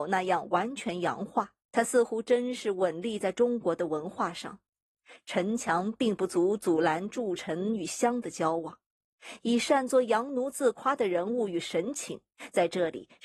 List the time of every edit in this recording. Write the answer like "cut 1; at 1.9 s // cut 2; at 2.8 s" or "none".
cut 1; at 1.6 s